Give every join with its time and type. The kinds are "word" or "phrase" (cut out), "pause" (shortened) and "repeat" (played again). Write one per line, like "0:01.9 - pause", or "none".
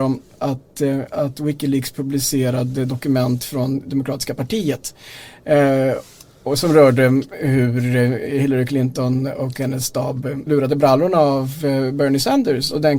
0:10.5 - word